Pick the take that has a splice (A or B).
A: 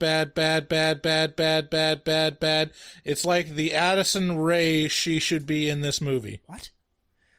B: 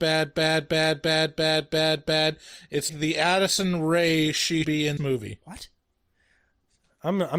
B